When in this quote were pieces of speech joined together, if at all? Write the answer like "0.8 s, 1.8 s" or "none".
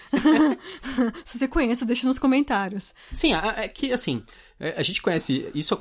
none